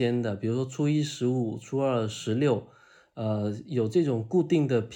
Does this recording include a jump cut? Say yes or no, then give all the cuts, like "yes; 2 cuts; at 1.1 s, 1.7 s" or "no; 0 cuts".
no; 0 cuts